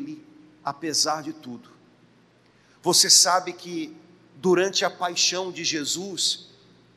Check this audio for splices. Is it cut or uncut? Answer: uncut